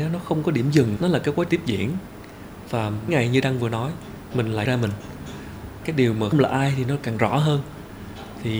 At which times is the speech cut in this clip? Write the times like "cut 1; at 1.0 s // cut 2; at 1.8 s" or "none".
cut 1; at 1.0 s // cut 2; at 1.5 s // cut 3; at 3.1 s // cut 4; at 4.7 s // cut 5; at 5.8 s // cut 6; at 6.3 s